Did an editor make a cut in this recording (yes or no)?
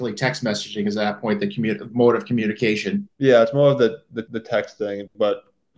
yes